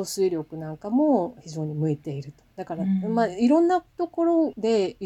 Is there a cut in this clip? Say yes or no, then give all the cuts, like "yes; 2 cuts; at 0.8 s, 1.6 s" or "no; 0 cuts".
yes; 1 cut; at 3.9 s